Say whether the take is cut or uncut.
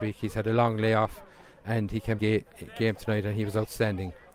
cut